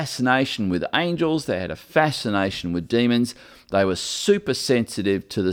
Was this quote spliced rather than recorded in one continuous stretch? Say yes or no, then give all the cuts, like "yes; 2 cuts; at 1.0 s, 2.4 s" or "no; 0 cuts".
no; 0 cuts